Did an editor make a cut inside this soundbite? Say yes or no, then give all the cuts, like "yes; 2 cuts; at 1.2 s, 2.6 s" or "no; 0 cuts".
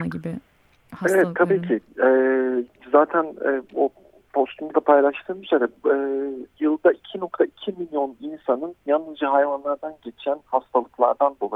no; 0 cuts